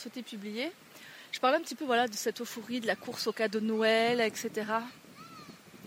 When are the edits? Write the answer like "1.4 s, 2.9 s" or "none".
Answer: none